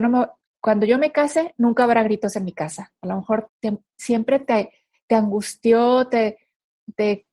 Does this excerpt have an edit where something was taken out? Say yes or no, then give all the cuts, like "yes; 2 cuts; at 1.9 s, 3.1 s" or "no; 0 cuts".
yes; 1 cut; at 3.5 s